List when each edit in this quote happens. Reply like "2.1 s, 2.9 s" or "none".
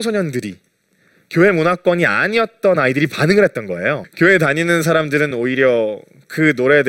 none